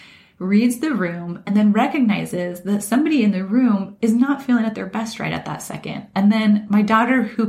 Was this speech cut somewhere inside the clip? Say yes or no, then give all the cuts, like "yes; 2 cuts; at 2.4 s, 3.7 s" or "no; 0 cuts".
no; 0 cuts